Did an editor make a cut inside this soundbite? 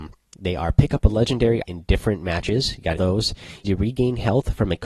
yes; 3 cuts; at 1.6 s, 3.0 s, 3.6 s

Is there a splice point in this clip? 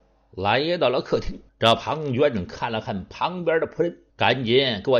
yes; 2 cuts; at 1.5 s, 4.1 s

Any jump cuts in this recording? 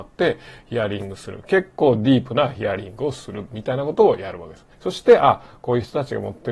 yes; 1 cut; at 4.7 s

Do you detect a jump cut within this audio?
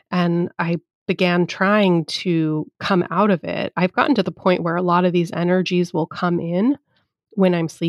no; 0 cuts

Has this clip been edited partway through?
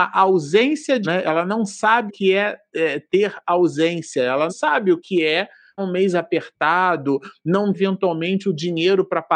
yes; 6 cuts; at 1.0 s, 2.1 s, 4.5 s, 5.0 s, 5.8 s, 7.7 s

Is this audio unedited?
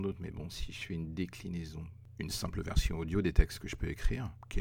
yes; 0 cuts

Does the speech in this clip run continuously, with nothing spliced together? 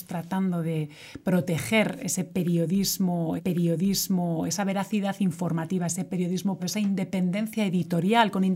no; 2 cuts; at 3.4 s, 6.6 s

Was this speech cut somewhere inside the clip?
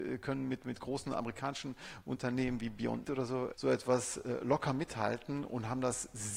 yes; 2 cuts; at 3.0 s, 3.5 s

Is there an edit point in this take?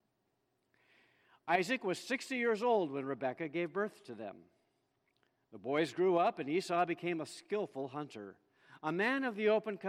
no; 0 cuts

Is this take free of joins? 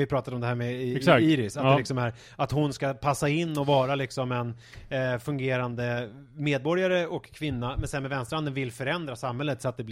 yes; 0 cuts

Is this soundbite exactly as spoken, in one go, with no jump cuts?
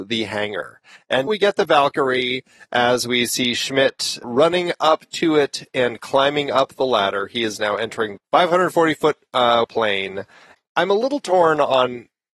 no; 4 cuts; at 1.3 s, 4.2 s, 8.2 s, 9.6 s

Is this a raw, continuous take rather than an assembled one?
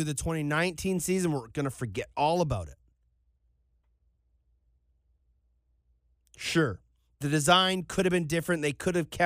yes; 0 cuts

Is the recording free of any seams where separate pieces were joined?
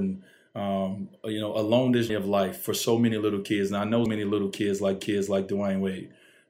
no; 3 cuts; at 2.1 s, 4.1 s, 5.0 s

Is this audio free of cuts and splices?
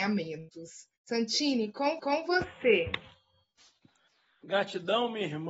no; 2 cuts; at 1.0 s, 2.0 s

